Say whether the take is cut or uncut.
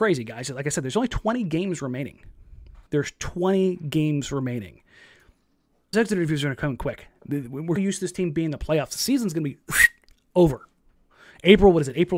cut